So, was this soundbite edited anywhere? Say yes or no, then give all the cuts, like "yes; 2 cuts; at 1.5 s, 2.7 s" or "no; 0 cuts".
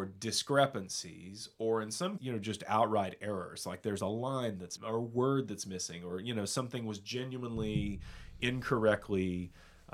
yes; 2 cuts; at 2.2 s, 4.8 s